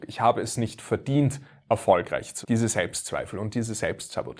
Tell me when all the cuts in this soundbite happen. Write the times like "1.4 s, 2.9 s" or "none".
2.4 s